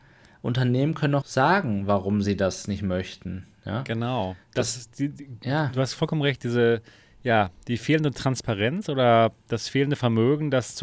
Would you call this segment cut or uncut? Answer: cut